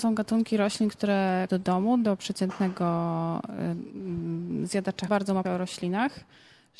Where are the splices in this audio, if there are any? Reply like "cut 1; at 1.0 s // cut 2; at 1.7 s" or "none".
cut 1; at 1.5 s // cut 2; at 5.1 s // cut 3; at 5.4 s